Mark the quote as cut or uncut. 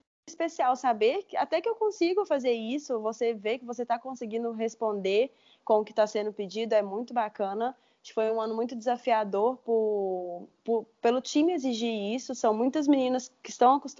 uncut